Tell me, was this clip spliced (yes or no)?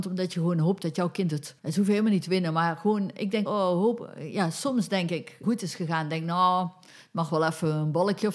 yes